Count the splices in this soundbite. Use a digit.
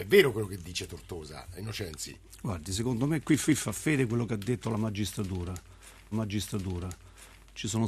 2